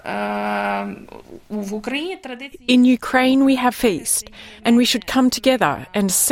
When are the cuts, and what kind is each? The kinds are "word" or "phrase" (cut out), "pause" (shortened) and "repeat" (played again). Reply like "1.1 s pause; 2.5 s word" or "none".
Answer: 3.7 s phrase; 4.6 s pause